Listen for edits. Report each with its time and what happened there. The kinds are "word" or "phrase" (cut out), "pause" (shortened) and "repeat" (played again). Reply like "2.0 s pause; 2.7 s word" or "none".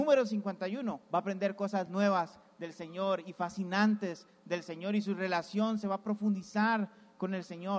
none